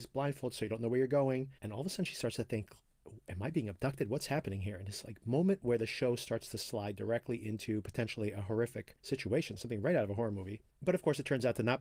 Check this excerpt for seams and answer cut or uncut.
cut